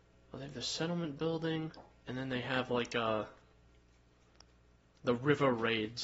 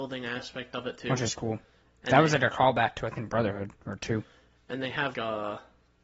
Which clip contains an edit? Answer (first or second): second